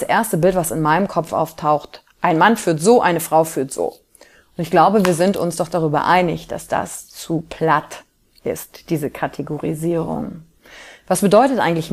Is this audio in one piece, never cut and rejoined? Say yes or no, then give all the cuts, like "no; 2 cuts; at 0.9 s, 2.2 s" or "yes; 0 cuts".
yes; 0 cuts